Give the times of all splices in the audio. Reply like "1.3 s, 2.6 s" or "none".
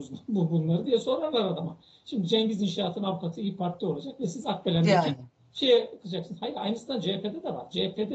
none